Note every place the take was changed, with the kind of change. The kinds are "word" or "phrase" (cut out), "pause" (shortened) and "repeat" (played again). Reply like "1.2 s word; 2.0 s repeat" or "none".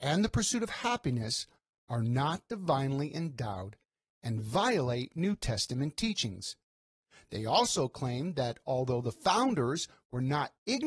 none